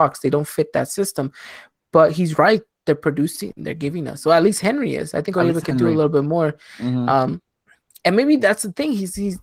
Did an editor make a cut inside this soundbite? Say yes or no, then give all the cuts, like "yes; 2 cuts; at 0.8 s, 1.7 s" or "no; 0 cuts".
no; 0 cuts